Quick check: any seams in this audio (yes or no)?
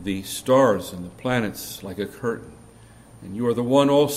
no